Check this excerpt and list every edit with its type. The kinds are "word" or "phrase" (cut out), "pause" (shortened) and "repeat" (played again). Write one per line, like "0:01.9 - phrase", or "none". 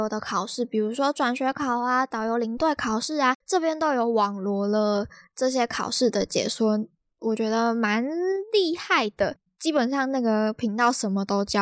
none